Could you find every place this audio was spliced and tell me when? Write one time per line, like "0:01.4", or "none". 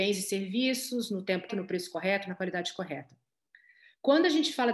0:01.5